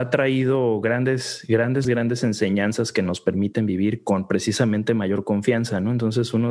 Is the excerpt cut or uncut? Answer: cut